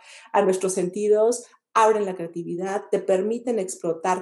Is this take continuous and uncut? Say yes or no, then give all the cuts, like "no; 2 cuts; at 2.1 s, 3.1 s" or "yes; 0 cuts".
yes; 0 cuts